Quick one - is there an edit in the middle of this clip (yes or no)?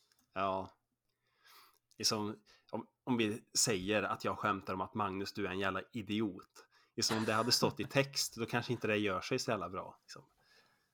no